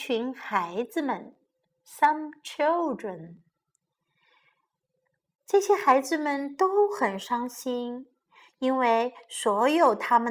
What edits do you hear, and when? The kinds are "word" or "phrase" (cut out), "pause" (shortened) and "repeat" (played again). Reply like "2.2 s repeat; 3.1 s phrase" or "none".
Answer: none